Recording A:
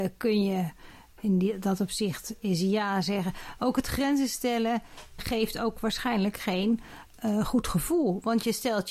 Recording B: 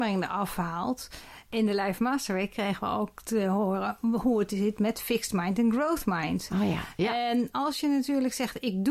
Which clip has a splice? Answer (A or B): A